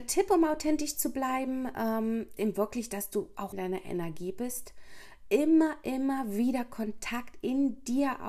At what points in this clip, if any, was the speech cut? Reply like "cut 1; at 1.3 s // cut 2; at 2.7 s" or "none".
cut 1; at 2.4 s // cut 2; at 3.5 s